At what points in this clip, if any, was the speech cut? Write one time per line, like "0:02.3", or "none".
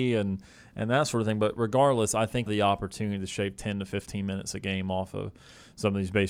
0:02.5